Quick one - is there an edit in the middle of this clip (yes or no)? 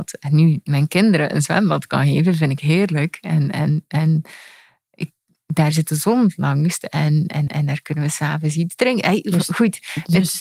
yes